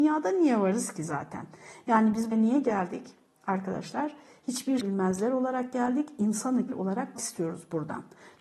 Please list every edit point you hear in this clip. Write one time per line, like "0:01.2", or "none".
0:02.3
0:04.8
0:06.7
0:07.1